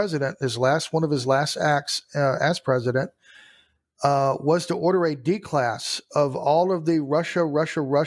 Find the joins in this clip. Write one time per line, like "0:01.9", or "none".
none